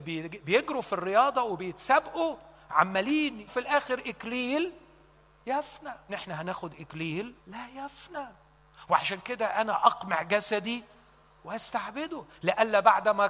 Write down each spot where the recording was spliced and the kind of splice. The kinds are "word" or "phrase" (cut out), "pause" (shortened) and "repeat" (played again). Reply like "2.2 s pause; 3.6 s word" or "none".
3.5 s phrase; 6.1 s word; 7.4 s pause